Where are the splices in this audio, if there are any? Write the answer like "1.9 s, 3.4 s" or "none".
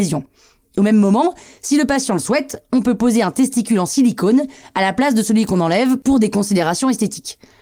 none